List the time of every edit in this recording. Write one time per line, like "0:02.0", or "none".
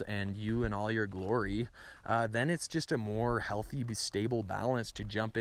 none